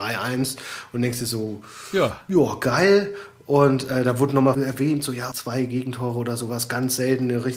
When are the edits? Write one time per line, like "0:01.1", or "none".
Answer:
0:04.5
0:05.3

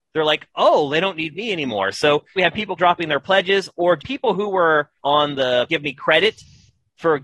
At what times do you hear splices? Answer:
0:02.4
0:02.8
0:04.0
0:05.0
0:05.7

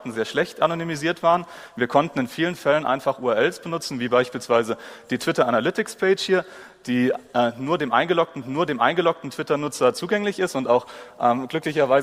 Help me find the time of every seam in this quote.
0:08.4

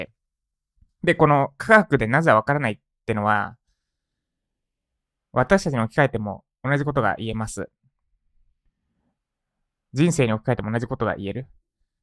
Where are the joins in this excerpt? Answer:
none

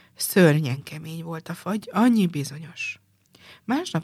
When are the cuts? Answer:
none

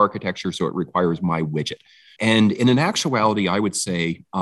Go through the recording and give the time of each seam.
0:02.2

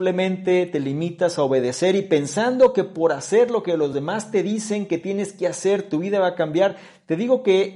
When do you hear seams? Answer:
none

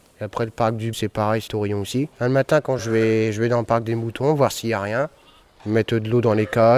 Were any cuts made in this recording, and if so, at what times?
0:00.9
0:01.5
0:02.1
0:02.8

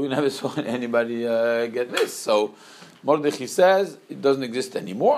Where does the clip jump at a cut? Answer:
0:01.9

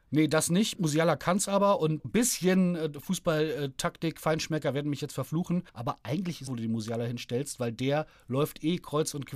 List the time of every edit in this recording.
0:02.0
0:05.7
0:06.5

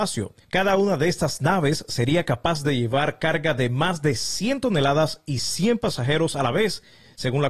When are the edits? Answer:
none

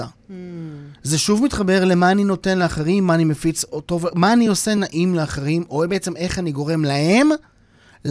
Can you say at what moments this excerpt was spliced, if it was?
none

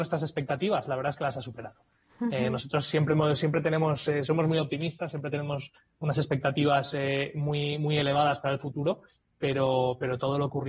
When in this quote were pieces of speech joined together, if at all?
none

